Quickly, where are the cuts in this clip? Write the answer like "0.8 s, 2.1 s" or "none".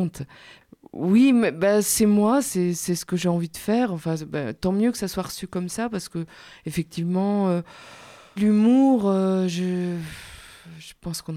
8.4 s